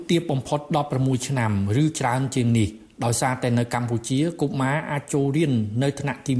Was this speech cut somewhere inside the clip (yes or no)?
no